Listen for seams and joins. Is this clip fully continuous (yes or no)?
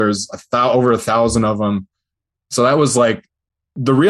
yes